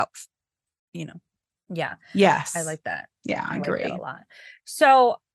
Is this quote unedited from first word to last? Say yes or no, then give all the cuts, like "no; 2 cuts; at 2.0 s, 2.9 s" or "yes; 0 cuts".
yes; 0 cuts